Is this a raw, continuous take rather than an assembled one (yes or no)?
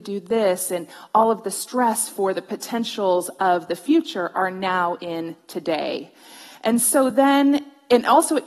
yes